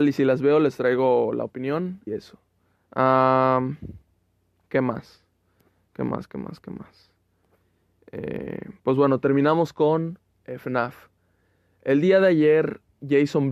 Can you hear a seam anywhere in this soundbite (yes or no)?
yes